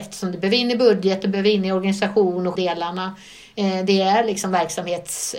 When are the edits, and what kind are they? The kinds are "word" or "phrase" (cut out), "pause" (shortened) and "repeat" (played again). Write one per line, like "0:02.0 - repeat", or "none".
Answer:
0:02.6 - phrase